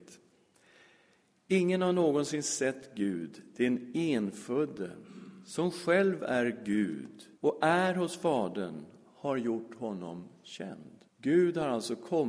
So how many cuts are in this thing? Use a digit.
2